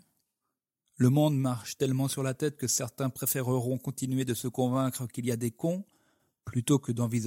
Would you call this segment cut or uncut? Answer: uncut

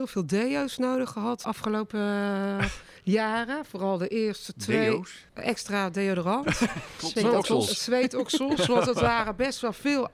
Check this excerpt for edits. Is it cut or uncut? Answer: cut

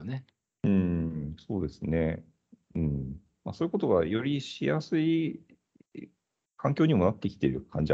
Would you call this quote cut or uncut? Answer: uncut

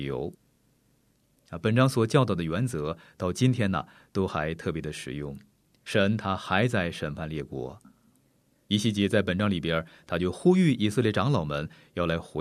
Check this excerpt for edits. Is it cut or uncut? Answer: uncut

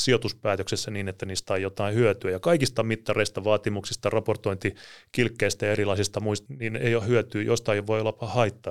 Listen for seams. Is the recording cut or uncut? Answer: cut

